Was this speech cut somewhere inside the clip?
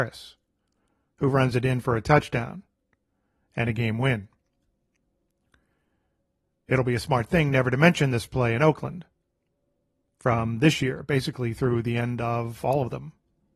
no; 0 cuts

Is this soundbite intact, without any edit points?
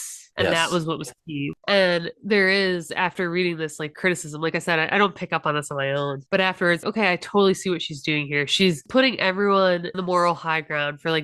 no; 2 cuts; at 6.8 s, 9.9 s

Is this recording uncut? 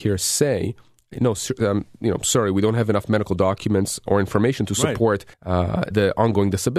no; 4 cuts; at 1.1 s, 4.1 s, 5.3 s, 5.9 s

